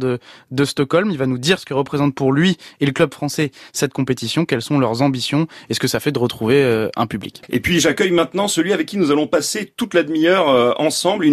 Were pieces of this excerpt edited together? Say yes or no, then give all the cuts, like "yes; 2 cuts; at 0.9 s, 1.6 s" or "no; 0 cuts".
no; 0 cuts